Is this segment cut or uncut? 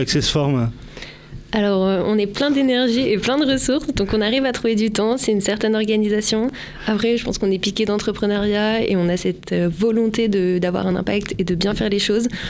uncut